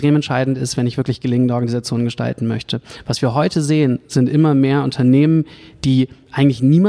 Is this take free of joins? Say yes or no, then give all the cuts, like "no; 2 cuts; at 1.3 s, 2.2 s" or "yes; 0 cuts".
yes; 0 cuts